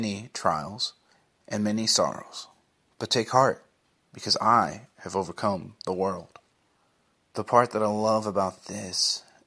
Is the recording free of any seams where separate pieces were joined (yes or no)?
yes